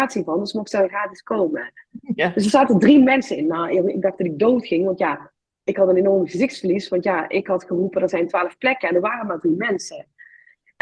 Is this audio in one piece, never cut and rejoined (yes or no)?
yes